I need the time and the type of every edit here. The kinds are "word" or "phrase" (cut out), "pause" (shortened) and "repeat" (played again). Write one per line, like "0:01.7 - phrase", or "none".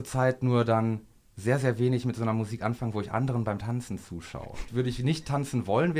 none